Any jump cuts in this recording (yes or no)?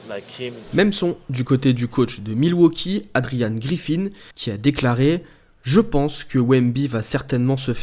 yes